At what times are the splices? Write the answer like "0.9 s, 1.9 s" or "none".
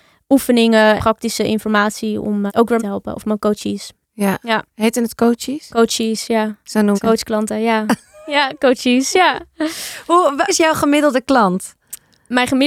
1.0 s, 2.5 s, 2.8 s, 4.0 s, 4.7 s, 6.9 s, 10.5 s